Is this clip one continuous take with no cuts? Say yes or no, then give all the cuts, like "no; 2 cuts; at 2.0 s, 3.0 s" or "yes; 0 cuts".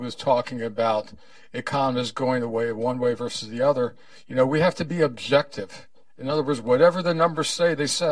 yes; 0 cuts